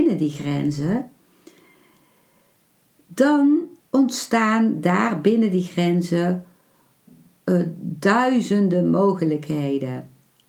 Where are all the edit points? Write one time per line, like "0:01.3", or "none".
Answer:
0:03.8

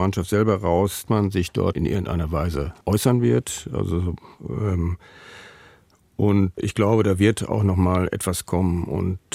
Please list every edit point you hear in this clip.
0:01.1
0:01.7
0:02.8
0:06.6

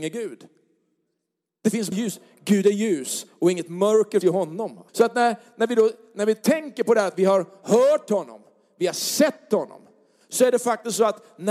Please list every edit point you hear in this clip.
0:01.9
0:04.2
0:04.9

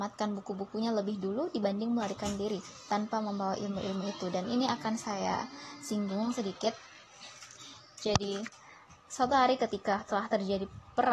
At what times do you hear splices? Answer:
none

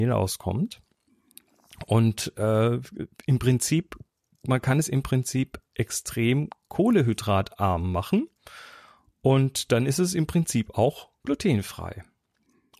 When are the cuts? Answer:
none

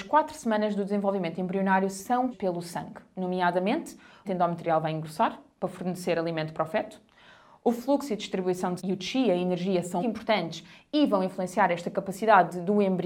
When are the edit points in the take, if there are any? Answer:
0:02.3
0:04.2
0:08.8
0:10.0

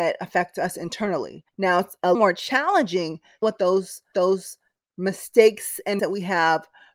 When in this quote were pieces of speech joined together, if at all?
0:01.5
0:02.1
0:03.4
0:04.1
0:06.0

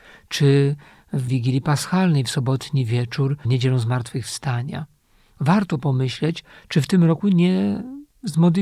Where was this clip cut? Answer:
0:01.3
0:03.4

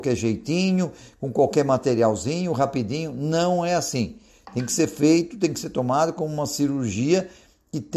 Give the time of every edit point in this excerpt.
none

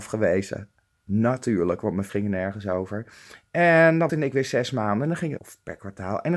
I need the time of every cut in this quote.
0:02.1
0:04.1
0:05.4

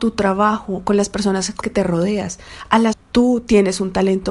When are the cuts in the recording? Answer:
0:01.6
0:02.9

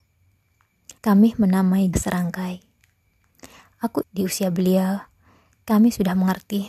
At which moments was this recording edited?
0:01.0
0:01.9
0:04.0

